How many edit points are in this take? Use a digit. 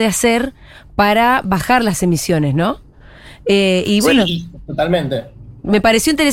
0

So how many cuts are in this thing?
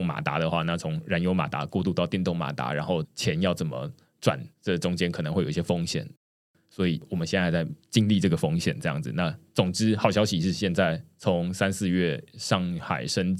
1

